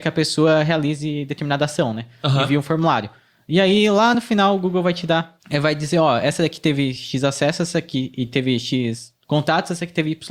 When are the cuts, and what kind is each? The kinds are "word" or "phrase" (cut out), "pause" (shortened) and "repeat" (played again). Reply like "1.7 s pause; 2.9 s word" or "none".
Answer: none